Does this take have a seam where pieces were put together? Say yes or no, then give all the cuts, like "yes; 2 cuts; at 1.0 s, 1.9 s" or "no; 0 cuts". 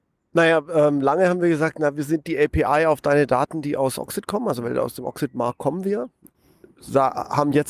no; 0 cuts